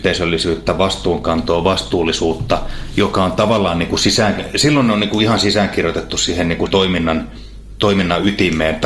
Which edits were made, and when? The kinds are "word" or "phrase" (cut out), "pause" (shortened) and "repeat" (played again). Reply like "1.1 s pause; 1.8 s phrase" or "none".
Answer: 6.7 s word